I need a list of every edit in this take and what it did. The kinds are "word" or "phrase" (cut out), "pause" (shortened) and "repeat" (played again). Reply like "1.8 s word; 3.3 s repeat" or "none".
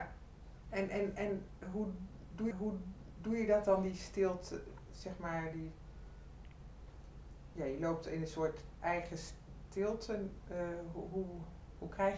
2.5 s repeat